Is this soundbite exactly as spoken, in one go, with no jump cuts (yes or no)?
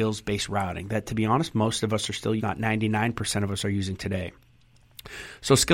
no